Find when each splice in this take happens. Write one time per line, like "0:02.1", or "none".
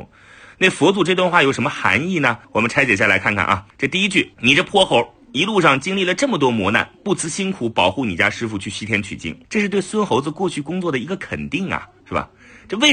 0:02.4
0:03.7
0:04.3
0:09.4
0:12.0